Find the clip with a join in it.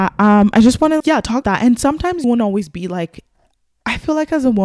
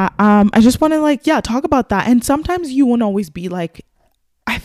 first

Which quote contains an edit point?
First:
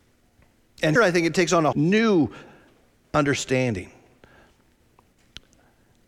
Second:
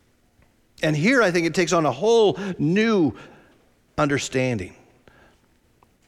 first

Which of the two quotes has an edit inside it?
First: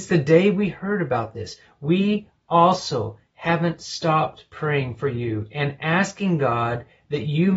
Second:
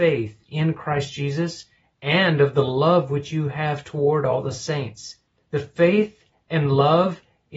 second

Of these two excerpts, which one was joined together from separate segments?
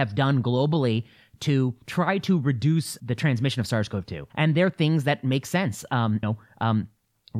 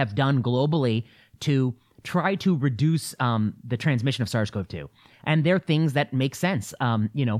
first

